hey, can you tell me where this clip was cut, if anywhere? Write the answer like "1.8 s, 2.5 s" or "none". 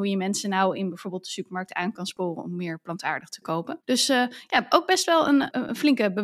3.8 s